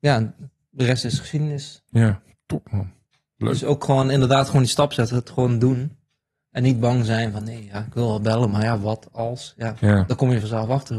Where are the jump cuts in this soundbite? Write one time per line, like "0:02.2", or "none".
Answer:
0:07.4